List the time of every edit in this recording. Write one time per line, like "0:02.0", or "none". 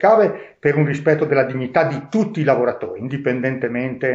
none